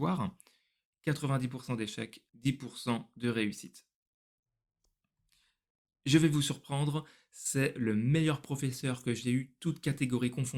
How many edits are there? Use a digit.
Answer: 1